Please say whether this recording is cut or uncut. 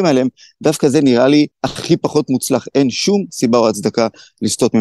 cut